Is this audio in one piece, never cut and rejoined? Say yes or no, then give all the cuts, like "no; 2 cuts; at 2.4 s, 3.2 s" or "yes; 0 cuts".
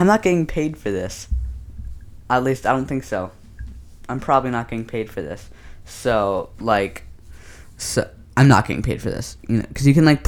yes; 0 cuts